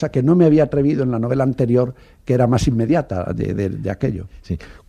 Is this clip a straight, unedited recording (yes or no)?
yes